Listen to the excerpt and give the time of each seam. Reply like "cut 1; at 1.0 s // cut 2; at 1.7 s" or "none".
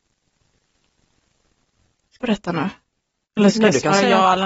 cut 1; at 2.2 s // cut 2; at 3.5 s

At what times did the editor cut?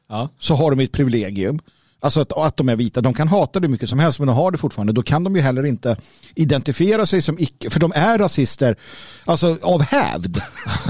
none

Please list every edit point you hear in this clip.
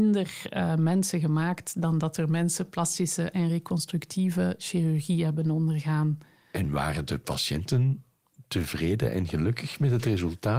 none

